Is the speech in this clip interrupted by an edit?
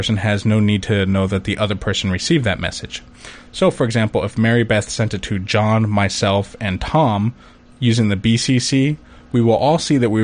no; 0 cuts

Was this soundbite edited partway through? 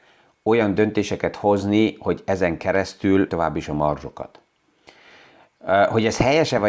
yes; 1 cut; at 3.3 s

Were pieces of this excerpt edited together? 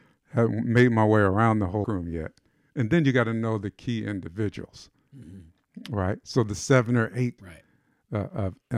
yes; 2 cuts; at 1.8 s, 7.4 s

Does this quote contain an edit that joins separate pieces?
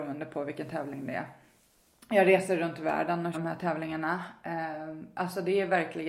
yes; 1 cut; at 3.3 s

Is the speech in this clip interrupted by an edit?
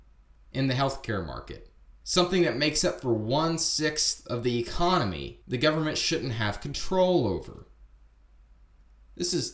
yes; 2 cuts; at 1.9 s, 5.4 s

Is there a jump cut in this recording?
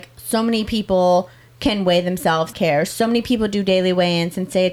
yes; 2 cuts; at 1.5 s, 2.5 s

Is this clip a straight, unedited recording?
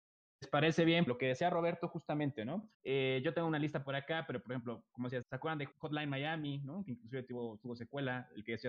no; 4 cuts; at 1.1 s, 2.7 s, 5.2 s, 5.7 s

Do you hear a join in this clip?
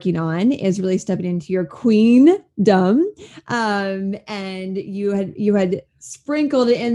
no; 0 cuts

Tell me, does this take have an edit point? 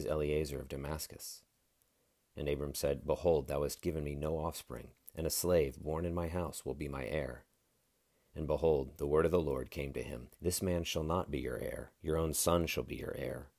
yes; 2 cuts; at 10.3 s, 12.0 s

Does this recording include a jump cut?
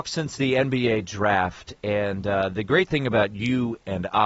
no; 0 cuts

